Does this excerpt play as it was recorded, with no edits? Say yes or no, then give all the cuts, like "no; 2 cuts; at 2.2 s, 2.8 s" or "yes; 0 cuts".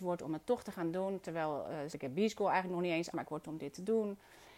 no; 3 cuts; at 1.9 s, 3.1 s, 3.4 s